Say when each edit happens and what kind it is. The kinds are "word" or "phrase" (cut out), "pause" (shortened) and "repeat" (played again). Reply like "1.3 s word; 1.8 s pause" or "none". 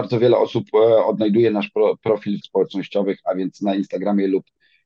2.4 s phrase